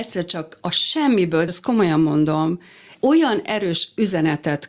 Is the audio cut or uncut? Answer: cut